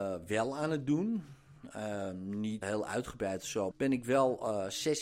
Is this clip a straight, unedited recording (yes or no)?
no